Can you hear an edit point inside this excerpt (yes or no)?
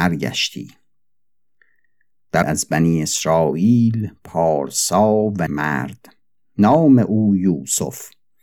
yes